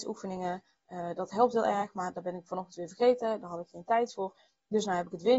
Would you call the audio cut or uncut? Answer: uncut